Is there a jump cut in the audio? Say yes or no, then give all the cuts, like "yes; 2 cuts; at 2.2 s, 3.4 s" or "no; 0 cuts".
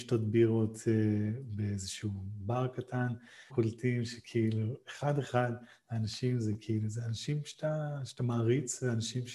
yes; 1 cut; at 3.5 s